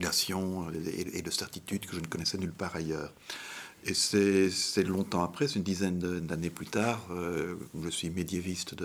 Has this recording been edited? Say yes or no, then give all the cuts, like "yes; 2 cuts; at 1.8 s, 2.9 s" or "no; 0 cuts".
no; 0 cuts